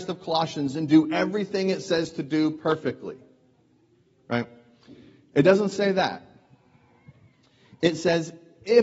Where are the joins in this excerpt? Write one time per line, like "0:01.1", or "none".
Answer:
none